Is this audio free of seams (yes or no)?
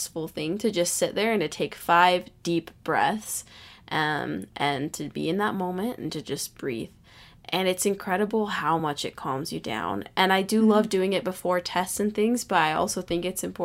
yes